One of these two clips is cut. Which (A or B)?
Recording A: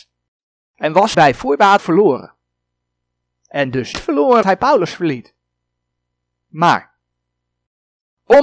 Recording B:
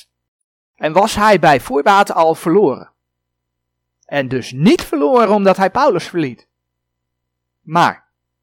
A